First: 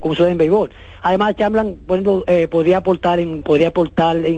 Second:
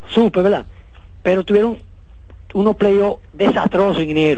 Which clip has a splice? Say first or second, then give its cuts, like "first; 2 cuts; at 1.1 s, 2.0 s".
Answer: first; 1 cut; at 3.4 s